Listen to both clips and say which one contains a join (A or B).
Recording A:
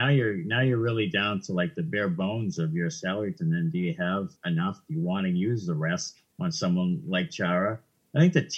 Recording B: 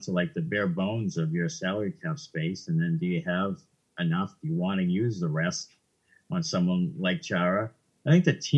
A